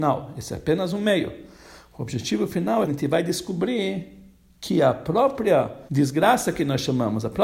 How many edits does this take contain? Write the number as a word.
two